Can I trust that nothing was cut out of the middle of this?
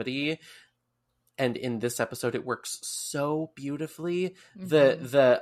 yes; 0 cuts

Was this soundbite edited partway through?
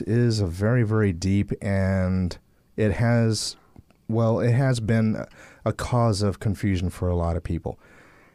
no; 0 cuts

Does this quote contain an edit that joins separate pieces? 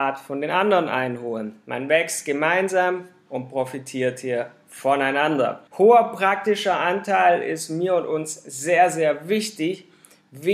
yes; 1 cut; at 5.7 s

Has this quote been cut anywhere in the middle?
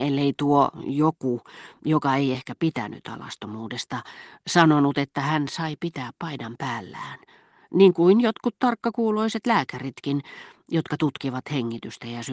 no; 0 cuts

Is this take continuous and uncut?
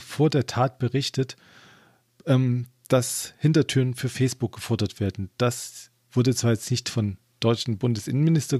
yes; 0 cuts

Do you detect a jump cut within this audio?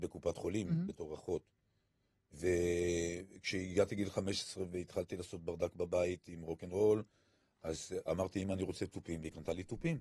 no; 0 cuts

